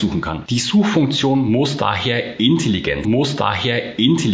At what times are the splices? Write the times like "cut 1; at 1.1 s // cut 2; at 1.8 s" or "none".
cut 1; at 3.0 s